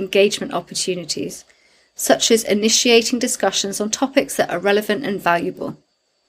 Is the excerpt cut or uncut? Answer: uncut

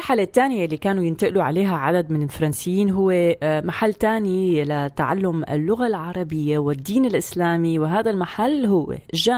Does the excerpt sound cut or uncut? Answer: uncut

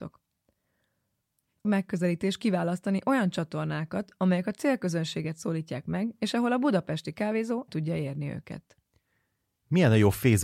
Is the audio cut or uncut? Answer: cut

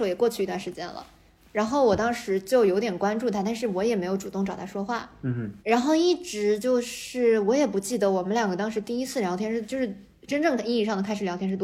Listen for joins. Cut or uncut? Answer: cut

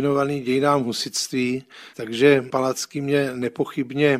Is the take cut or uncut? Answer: uncut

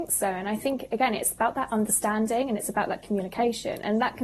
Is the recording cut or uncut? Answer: uncut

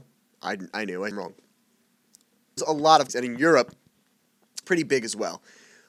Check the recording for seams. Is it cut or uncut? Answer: cut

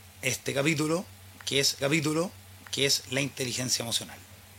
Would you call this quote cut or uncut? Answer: cut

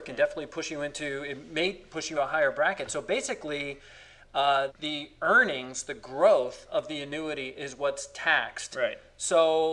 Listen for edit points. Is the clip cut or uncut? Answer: cut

